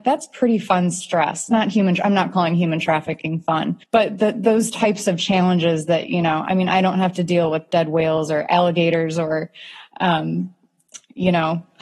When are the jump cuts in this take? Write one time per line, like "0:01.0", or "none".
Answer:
0:03.8